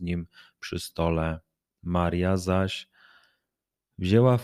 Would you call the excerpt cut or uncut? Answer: uncut